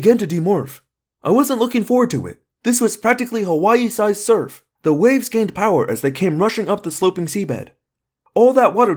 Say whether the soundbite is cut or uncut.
cut